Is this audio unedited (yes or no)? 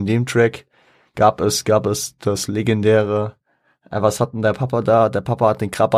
yes